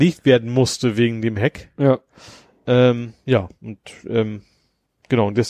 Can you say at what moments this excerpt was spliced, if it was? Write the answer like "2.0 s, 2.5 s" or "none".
none